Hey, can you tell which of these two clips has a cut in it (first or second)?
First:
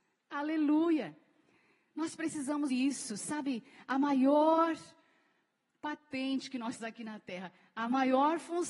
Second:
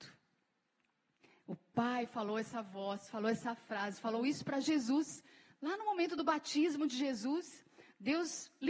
first